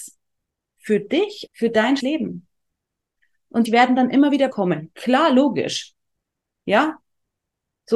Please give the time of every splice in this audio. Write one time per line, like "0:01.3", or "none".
0:01.5
0:02.0
0:03.6
0:04.5

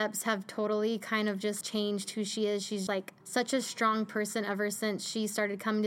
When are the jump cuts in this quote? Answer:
0:01.6
0:02.9
0:03.2

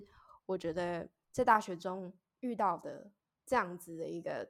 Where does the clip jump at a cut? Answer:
0:03.2

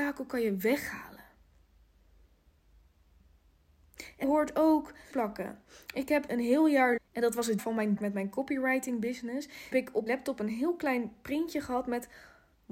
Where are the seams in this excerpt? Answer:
0:04.2
0:05.1
0:06.3
0:07.0
0:07.6
0:08.0
0:09.7
0:10.1

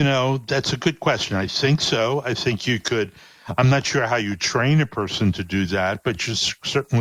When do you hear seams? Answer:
none

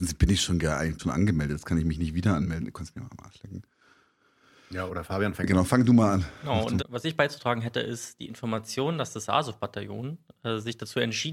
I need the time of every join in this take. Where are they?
0:01.0
0:04.9
0:05.6
0:06.8

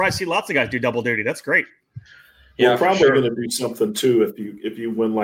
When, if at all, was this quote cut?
none

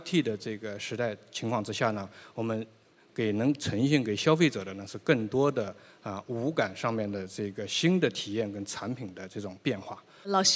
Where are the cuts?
none

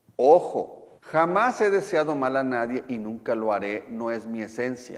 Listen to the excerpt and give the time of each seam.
0:01.0

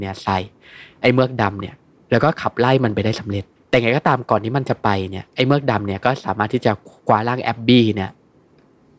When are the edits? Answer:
0:03.6

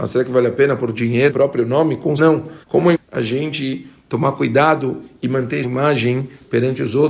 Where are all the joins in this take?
0:01.3
0:02.2
0:02.6
0:02.9
0:05.6

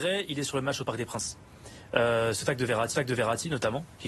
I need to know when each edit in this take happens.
0:02.9

